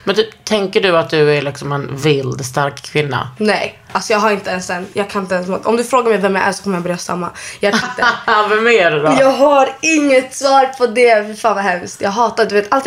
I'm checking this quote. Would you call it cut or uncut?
cut